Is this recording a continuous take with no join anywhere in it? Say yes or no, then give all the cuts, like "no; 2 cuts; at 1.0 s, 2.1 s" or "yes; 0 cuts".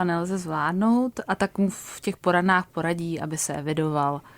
no; 1 cut; at 1.2 s